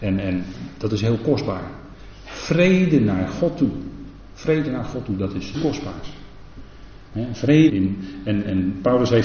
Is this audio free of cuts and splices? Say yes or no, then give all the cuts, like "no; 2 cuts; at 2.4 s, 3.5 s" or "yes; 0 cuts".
no; 2 cuts; at 5.5 s, 7.7 s